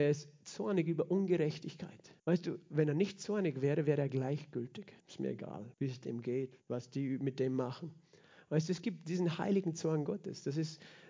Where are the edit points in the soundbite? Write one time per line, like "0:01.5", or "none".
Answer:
0:02.2
0:05.0
0:05.7
0:06.6

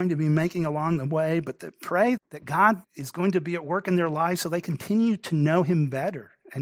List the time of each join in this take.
0:02.2
0:02.8

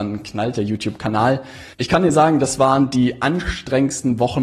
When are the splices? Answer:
0:01.7

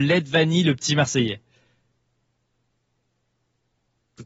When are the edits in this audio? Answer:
none

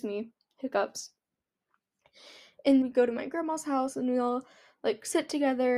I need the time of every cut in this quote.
0:02.8

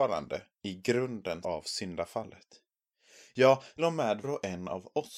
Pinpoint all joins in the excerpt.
0:01.4
0:03.8
0:04.2

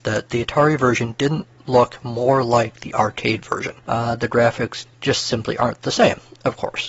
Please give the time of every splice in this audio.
0:01.5
0:03.8
0:04.9

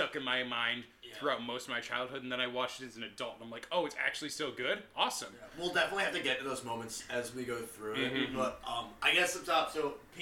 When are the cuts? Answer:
none

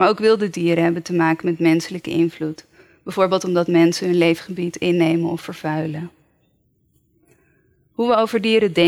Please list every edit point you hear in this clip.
none

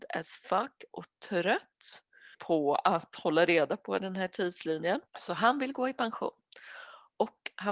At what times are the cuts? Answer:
0:02.3
0:05.1

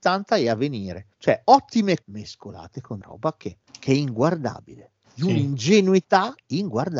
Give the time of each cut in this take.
0:01.1
0:02.0
0:03.0
0:03.7

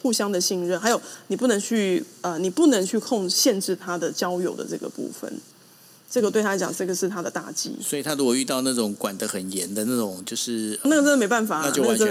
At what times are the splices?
0:10.8

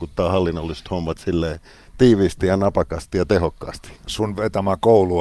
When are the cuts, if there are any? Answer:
none

